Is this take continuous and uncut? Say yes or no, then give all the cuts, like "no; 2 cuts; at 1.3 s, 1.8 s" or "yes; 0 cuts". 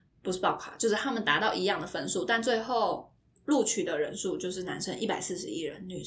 yes; 0 cuts